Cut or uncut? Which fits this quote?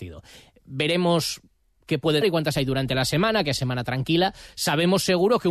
cut